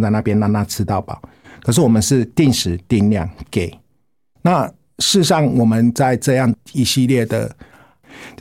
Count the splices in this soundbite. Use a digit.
0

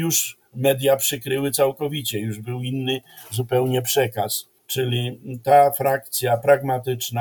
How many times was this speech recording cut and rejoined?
1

